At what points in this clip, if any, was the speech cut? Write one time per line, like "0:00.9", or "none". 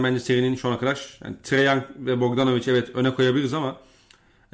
none